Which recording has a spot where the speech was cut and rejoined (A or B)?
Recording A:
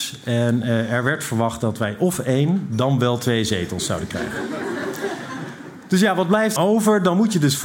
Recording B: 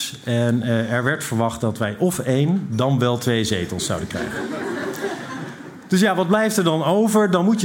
A